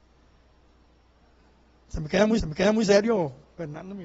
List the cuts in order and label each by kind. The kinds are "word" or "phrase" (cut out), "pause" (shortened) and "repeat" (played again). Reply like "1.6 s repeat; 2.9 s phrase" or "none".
2.4 s repeat